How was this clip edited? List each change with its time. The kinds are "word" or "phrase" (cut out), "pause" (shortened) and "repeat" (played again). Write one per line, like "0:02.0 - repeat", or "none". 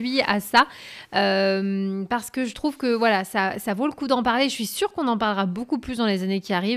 none